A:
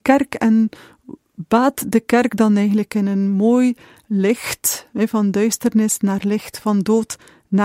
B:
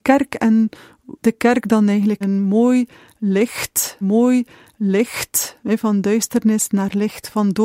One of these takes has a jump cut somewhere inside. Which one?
B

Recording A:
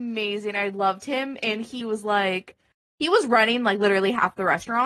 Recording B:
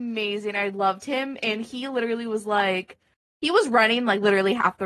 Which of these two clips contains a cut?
A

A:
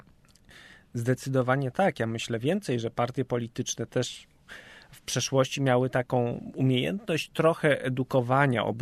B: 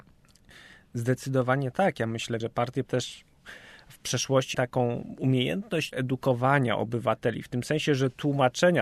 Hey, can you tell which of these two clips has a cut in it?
B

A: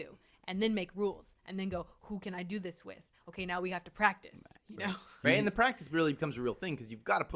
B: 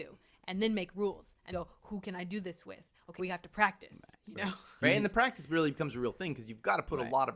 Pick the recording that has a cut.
B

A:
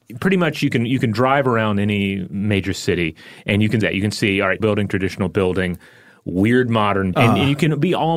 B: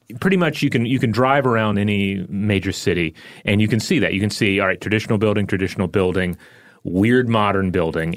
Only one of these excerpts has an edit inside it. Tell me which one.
A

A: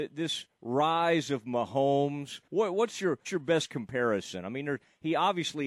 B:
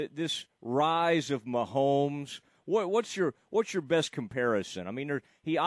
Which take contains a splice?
A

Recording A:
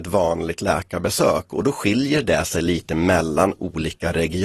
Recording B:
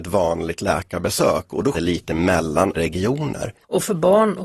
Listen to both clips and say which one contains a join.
B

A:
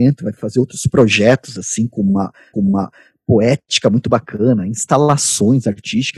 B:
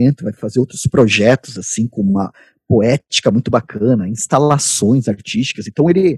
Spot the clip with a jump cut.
A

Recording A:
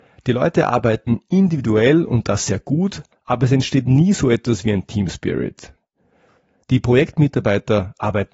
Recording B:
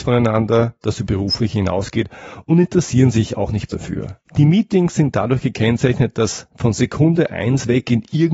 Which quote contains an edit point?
B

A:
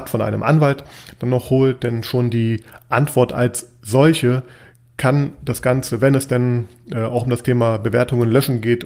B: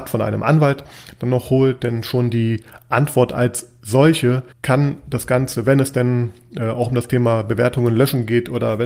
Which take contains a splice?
B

